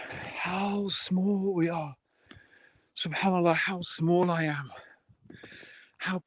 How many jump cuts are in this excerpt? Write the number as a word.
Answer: zero